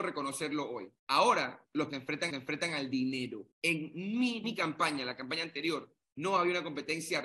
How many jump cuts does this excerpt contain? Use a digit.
5